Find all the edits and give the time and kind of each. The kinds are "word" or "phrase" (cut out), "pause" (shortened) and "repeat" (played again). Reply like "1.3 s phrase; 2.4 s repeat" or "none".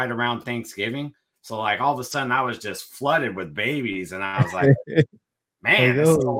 none